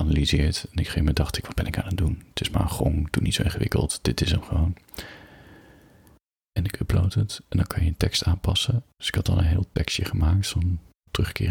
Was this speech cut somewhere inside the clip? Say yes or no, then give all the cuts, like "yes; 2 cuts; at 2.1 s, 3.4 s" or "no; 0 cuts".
no; 0 cuts